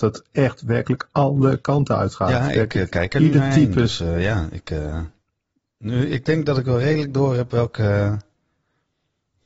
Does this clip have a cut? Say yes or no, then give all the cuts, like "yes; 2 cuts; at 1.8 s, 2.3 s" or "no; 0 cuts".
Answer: no; 0 cuts